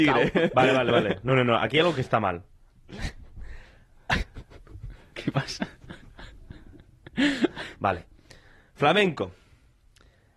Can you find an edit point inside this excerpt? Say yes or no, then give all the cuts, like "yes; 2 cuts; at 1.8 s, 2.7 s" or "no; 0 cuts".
no; 0 cuts